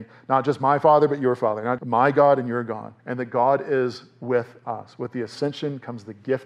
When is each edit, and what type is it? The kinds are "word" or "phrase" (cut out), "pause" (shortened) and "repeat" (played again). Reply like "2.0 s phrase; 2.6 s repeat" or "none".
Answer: 1.8 s word; 3.0 s pause